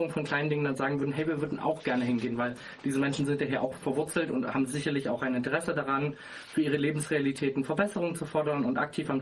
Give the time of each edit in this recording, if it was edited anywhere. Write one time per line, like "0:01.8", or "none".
none